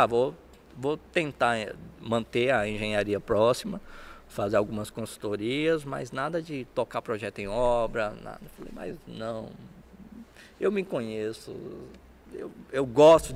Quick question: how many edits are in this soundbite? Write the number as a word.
zero